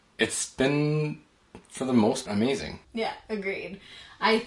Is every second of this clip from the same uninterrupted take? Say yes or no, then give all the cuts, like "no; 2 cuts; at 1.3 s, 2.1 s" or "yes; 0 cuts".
no; 2 cuts; at 2.3 s, 2.8 s